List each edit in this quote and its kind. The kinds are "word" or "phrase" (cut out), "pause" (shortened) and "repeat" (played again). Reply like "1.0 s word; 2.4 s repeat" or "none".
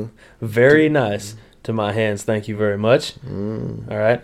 none